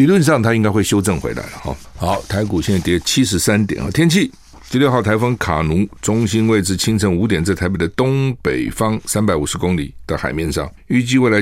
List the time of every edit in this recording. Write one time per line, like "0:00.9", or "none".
none